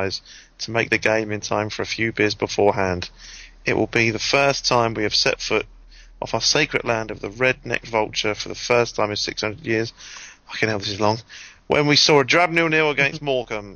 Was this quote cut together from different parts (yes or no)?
no